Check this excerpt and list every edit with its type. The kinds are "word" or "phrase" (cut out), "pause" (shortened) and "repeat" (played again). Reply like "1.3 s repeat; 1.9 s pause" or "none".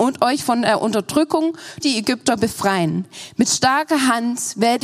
1.8 s word